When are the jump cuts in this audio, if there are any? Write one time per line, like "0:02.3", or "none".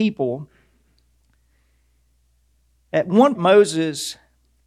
0:03.3